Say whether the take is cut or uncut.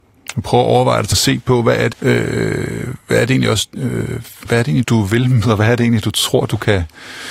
cut